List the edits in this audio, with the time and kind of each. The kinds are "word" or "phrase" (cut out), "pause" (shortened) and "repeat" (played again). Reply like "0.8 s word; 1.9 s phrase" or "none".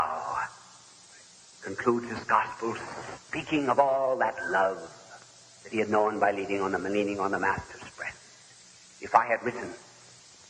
none